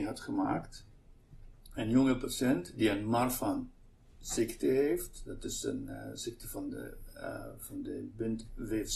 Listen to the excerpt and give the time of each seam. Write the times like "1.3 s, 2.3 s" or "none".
none